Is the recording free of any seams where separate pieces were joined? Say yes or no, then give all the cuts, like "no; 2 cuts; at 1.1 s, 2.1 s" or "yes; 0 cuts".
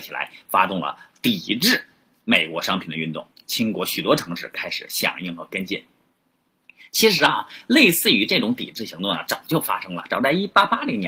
yes; 0 cuts